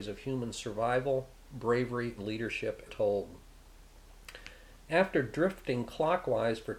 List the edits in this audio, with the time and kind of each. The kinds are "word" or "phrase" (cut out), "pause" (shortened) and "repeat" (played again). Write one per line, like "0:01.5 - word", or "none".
0:02.2 - word
0:02.9 - word